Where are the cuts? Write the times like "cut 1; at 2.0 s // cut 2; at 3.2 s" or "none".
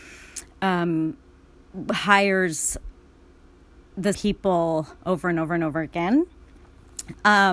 cut 1; at 4.1 s // cut 2; at 5.0 s